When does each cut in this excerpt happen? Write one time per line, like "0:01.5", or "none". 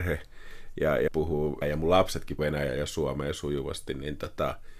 0:01.1
0:01.6
0:02.4